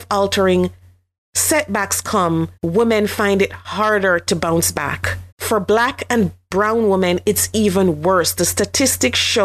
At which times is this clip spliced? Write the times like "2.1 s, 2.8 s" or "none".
2.6 s, 5.3 s